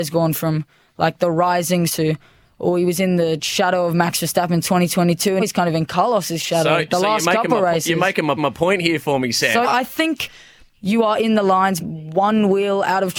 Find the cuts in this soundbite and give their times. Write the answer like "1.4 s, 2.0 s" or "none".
1.9 s, 5.4 s, 8.4 s, 9.6 s, 11.8 s